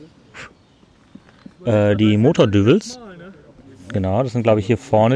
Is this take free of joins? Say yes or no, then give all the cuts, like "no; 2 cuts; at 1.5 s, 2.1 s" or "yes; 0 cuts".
yes; 0 cuts